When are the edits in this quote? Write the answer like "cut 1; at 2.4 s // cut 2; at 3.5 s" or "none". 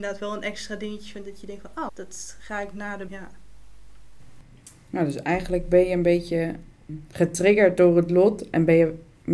cut 1; at 1.9 s // cut 2; at 3.1 s